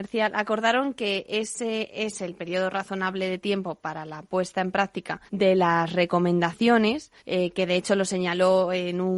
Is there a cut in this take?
yes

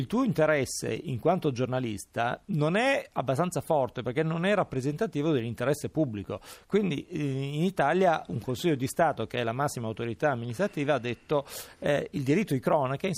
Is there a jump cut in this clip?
no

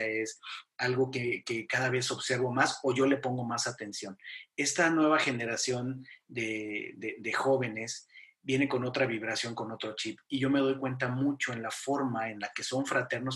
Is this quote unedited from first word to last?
yes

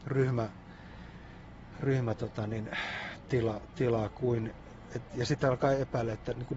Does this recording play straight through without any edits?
yes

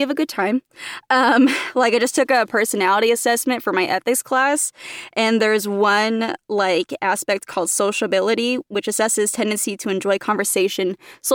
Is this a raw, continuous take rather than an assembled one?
yes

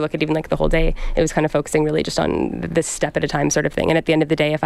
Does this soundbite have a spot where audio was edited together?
no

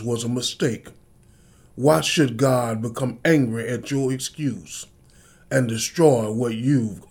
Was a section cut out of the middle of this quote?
no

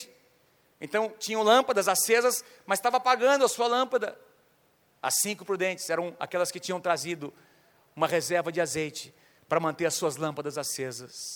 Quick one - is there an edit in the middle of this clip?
no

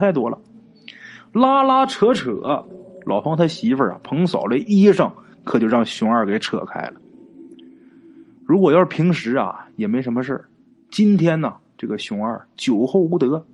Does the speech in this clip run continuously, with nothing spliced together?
yes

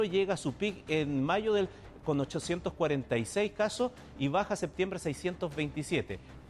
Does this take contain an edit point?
no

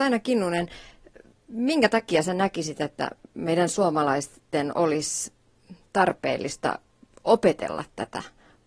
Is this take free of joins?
yes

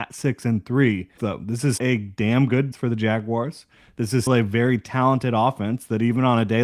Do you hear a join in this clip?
yes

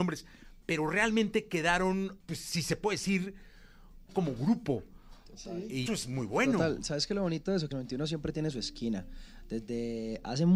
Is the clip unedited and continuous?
no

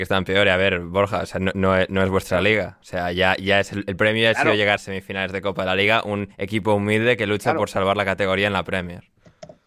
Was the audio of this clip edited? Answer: yes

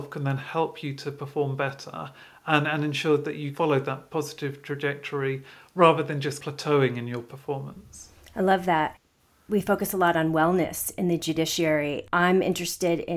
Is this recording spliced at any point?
no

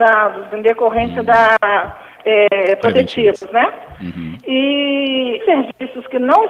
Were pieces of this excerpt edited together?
yes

